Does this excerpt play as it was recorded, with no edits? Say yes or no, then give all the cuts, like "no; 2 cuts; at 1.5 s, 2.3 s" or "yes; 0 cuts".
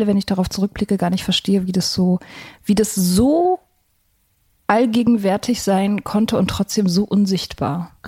yes; 0 cuts